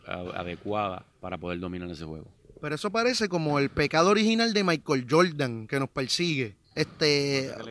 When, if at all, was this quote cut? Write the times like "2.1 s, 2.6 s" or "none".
1.1 s, 6.6 s